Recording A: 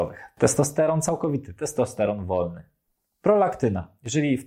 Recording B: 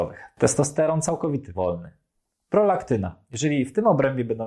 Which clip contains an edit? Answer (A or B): B